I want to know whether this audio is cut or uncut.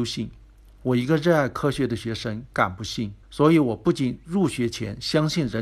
cut